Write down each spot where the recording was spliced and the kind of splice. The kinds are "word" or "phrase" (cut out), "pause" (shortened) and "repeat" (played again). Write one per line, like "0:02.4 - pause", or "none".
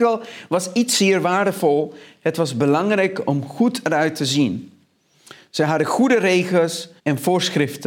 0:07.0 - pause